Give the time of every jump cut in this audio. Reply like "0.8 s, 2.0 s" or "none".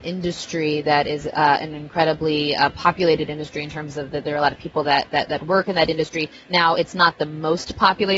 none